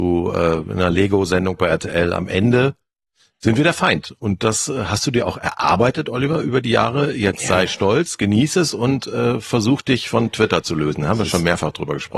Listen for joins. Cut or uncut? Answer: uncut